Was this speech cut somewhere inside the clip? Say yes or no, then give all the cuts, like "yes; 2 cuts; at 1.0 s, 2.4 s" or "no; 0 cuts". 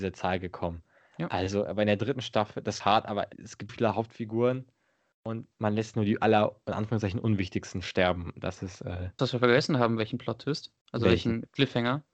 yes; 7 cuts; at 2.8 s, 3.3 s, 3.7 s, 5.5 s, 5.9 s, 9.2 s, 10.8 s